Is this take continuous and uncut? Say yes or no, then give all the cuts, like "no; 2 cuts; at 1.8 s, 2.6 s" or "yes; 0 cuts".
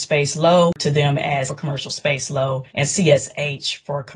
no; 2 cuts; at 1.5 s, 2.7 s